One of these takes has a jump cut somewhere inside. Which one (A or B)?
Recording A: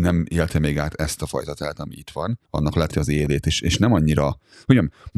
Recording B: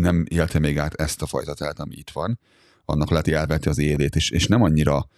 A